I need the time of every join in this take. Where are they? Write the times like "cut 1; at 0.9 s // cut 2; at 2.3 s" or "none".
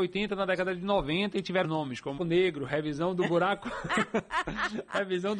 cut 1; at 1.6 s // cut 2; at 2.2 s